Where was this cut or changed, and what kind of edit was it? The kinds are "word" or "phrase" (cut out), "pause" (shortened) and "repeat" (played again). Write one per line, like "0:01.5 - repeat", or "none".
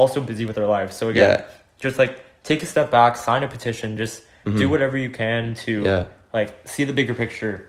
none

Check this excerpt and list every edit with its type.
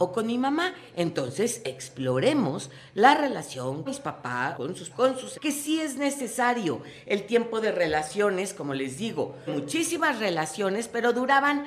0:03.9 - word
0:04.5 - word
0:04.9 - word
0:05.3 - word
0:09.5 - word

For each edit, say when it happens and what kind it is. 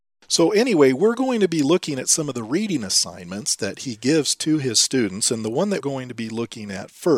0:05.8 - word

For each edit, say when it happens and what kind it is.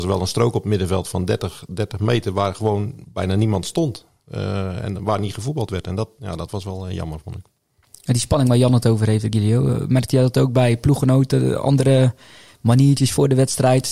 none

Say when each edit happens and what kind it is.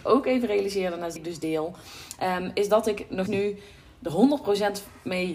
0:01.2 - phrase
0:03.3 - word

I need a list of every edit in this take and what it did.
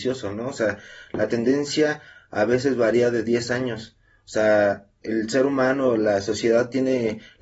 none

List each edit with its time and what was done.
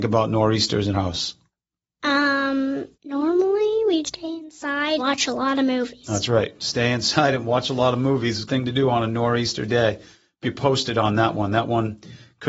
0:00.9 - word
0:02.9 - pause
0:04.0 - word
0:05.0 - word
0:08.5 - word
0:10.4 - phrase

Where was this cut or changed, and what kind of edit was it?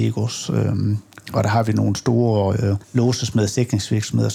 0:02.8 - pause

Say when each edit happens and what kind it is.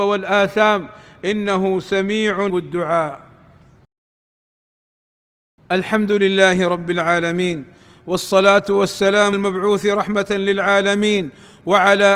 0:02.5 - word
0:09.3 - word

